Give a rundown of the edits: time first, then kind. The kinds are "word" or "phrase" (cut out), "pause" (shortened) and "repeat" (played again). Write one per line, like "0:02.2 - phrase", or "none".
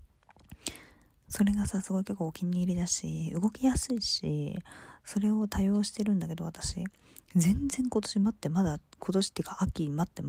none